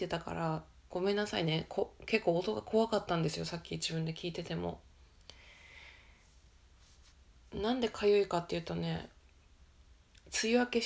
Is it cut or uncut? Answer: uncut